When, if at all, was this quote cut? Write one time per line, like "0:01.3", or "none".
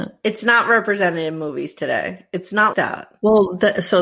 0:02.7